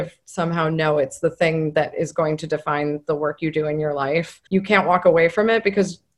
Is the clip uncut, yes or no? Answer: no